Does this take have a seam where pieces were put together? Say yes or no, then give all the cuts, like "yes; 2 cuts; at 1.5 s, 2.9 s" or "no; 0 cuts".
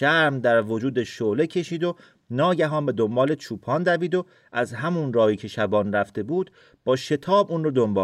no; 0 cuts